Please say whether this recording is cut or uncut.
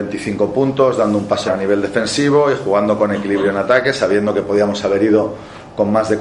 cut